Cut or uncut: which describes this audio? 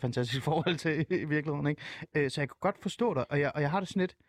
uncut